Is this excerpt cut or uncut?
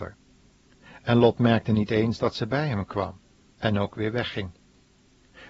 uncut